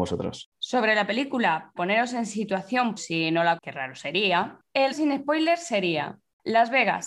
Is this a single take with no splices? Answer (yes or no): no